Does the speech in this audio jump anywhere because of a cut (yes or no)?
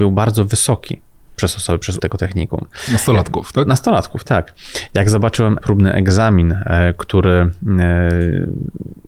yes